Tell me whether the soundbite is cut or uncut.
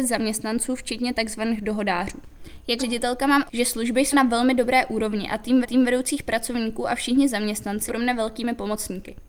cut